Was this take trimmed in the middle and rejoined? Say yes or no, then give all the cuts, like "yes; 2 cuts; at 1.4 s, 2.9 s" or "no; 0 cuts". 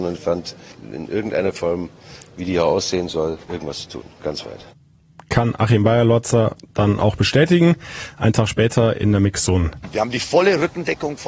yes; 1 cut; at 3.4 s